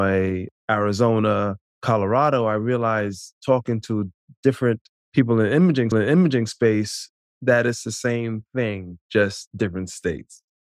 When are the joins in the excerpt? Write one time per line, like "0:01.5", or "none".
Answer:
0:05.9